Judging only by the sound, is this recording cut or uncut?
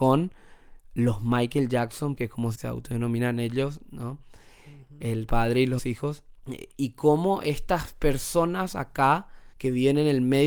cut